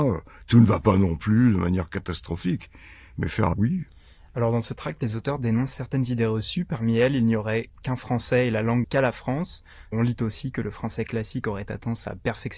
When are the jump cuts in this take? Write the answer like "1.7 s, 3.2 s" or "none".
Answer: 3.5 s, 8.8 s